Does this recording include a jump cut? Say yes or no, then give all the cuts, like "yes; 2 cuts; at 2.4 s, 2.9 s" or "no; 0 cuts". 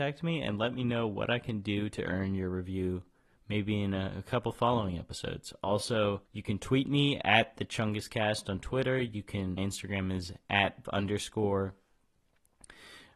yes; 4 cuts; at 6.3 s, 7.2 s, 9.6 s, 10.8 s